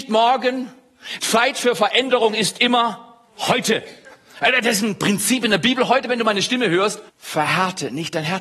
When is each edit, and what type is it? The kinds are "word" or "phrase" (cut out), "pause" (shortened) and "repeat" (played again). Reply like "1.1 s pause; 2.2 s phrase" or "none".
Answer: 3.3 s pause; 7.1 s pause